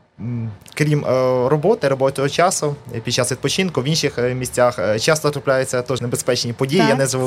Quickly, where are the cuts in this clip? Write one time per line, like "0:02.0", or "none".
0:06.0

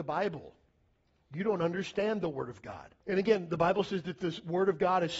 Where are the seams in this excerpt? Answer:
0:03.0

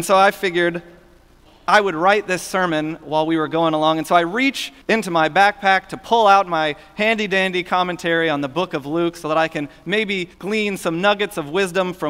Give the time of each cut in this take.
0:04.8
0:10.3

